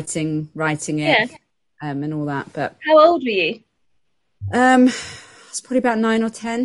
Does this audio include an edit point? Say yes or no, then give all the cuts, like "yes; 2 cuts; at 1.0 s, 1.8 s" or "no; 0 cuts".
no; 0 cuts